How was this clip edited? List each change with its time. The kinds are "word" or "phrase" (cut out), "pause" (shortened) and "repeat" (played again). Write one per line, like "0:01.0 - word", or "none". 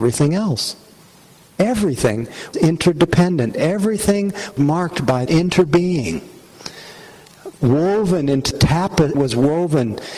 0:02.5 - word
0:04.6 - word
0:05.3 - word
0:08.5 - word
0:09.1 - word